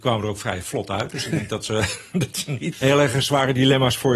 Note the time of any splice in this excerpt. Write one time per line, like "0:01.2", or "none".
0:02.7